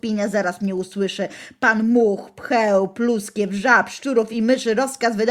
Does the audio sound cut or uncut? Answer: uncut